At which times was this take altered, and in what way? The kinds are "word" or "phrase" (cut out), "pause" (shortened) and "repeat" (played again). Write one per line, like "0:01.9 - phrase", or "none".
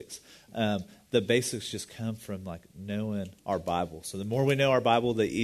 0:03.4 - pause